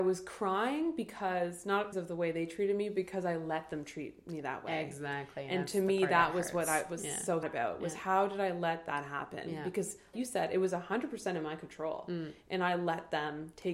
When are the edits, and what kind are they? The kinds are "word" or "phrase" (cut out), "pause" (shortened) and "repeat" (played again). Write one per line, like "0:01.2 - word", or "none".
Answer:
0:01.9 - word
0:07.4 - word
0:10.1 - word